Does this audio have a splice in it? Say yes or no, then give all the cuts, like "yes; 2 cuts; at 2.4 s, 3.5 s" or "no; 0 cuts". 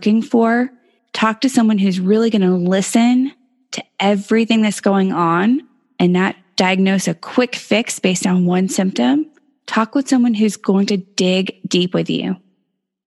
no; 0 cuts